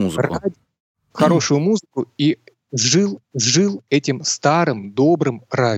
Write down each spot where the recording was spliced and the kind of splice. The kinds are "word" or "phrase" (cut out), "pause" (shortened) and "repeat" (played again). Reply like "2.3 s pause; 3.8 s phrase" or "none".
3.2 s repeat